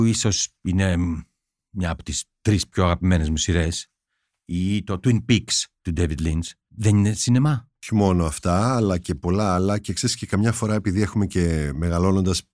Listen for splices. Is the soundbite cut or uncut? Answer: uncut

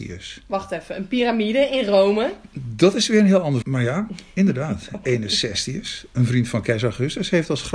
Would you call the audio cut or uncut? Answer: cut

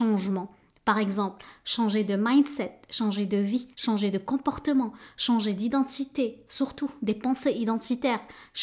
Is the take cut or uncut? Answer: cut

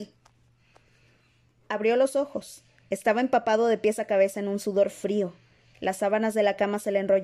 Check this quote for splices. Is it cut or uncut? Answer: uncut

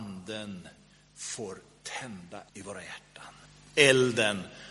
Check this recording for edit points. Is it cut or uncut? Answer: cut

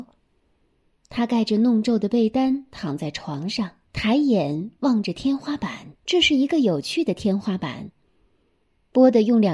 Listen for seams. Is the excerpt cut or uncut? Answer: cut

